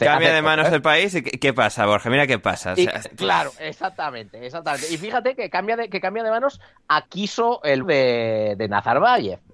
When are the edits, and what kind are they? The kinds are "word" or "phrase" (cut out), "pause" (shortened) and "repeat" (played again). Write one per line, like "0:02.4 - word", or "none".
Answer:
0:03.0 - word
0:07.1 - word
0:07.8 - word